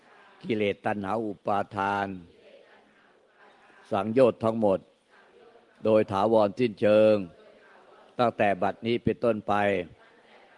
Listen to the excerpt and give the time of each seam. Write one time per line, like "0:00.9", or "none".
none